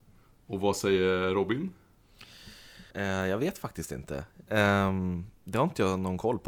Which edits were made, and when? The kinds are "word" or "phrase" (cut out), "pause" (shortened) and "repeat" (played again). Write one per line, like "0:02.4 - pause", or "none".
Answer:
0:02.9 - pause